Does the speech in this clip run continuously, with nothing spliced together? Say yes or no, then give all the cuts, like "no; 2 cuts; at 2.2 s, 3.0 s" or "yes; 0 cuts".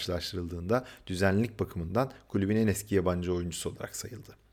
yes; 0 cuts